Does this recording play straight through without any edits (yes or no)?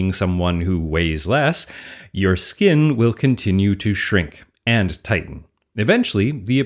yes